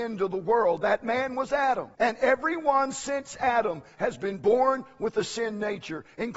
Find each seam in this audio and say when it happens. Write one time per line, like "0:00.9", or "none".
0:01.9